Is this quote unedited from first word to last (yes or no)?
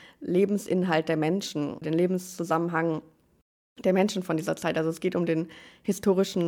no